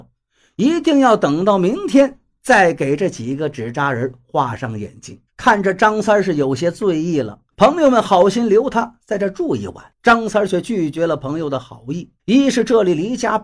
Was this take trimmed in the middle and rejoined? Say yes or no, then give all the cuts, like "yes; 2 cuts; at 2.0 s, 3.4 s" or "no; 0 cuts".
yes; 4 cuts; at 5.3 s, 7.5 s, 9.9 s, 12.2 s